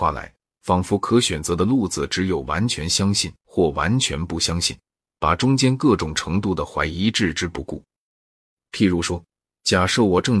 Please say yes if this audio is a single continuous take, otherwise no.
yes